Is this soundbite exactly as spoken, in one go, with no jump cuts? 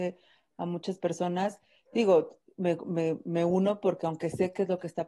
yes; 0 cuts

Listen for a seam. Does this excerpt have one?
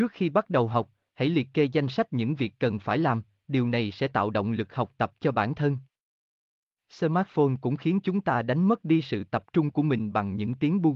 no; 0 cuts

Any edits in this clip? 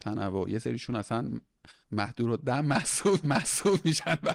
yes; 2 cuts; at 1.8 s, 3.2 s

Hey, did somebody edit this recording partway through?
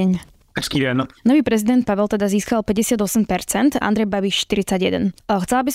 yes; 2 cuts; at 1.9 s, 3.8 s

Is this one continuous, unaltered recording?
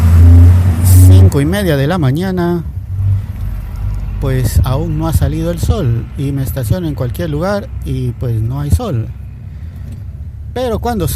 yes; 0 cuts

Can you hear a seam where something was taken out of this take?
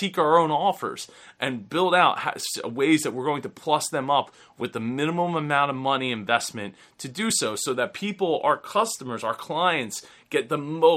no; 0 cuts

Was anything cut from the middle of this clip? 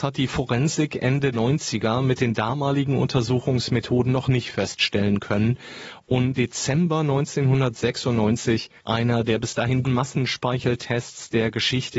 yes; 4 cuts; at 1.3 s, 6.4 s, 8.8 s, 9.8 s

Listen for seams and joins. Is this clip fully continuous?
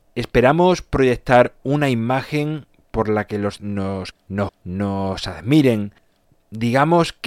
no; 3 cuts; at 3.6 s, 4.1 s, 4.5 s

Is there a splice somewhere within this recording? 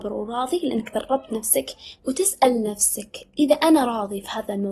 yes; 1 cut; at 2.0 s

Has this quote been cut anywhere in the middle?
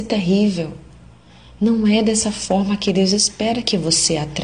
no; 0 cuts

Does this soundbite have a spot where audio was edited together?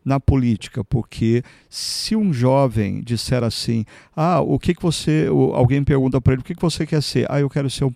no; 0 cuts

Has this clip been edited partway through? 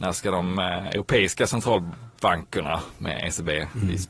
no; 0 cuts

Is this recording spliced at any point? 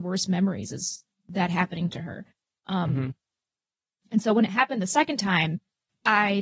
no; 0 cuts

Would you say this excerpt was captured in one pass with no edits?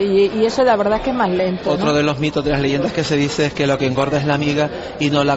yes; 0 cuts

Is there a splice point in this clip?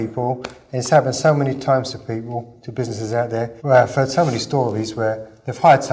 yes; 1 cut; at 3.6 s

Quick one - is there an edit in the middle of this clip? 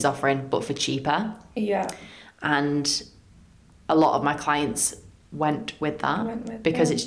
no; 0 cuts

